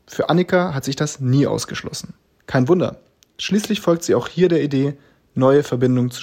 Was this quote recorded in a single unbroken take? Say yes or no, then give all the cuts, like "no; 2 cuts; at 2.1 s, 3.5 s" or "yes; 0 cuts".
yes; 0 cuts